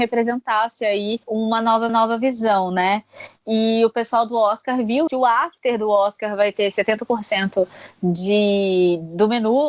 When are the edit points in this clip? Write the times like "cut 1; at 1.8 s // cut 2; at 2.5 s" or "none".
cut 1; at 1.2 s // cut 2; at 1.9 s // cut 3; at 5.1 s